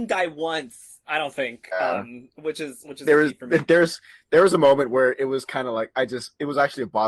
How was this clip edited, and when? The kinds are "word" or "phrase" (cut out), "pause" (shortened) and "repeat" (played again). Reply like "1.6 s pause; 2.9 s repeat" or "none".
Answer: none